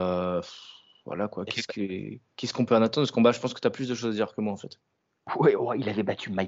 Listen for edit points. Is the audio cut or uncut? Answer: uncut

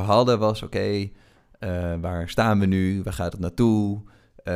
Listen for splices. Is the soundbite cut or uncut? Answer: uncut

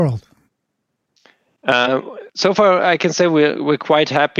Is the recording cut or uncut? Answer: uncut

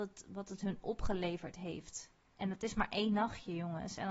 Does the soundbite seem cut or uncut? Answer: uncut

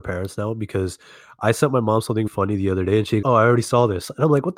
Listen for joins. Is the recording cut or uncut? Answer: cut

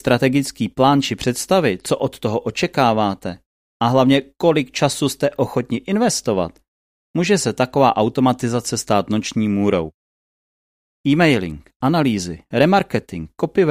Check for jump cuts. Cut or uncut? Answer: uncut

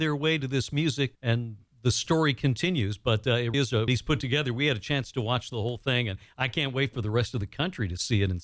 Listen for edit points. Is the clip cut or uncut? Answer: cut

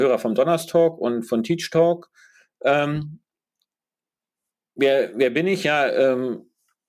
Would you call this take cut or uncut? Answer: uncut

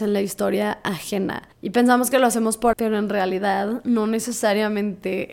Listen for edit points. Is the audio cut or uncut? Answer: cut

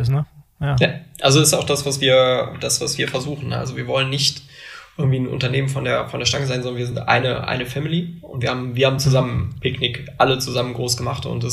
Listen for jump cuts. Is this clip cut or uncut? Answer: uncut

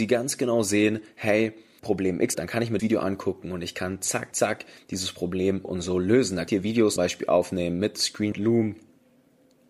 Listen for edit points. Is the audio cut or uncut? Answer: cut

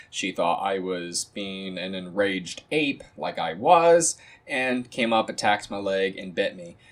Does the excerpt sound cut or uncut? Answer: uncut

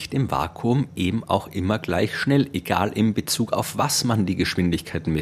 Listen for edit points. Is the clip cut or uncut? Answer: uncut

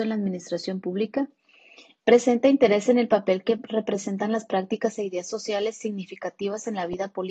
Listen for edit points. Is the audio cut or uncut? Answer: uncut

